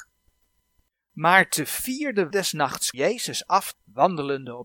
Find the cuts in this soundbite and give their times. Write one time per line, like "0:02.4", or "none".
0:02.3
0:02.9
0:03.7